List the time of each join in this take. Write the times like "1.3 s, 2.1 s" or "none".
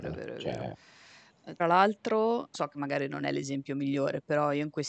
1.6 s, 2.5 s

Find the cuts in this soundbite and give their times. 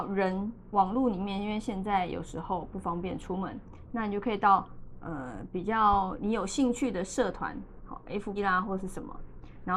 8.4 s

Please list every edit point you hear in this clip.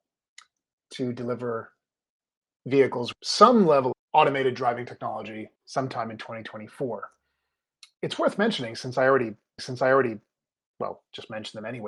3.1 s, 3.9 s, 5.6 s, 7.9 s, 9.6 s

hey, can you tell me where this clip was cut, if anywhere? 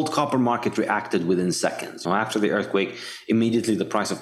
2.0 s

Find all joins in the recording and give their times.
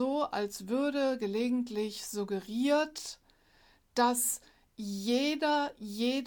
none

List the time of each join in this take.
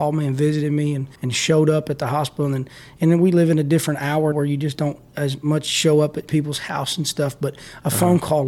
1.2 s, 4.3 s

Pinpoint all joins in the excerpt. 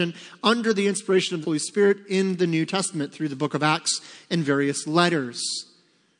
1.4 s

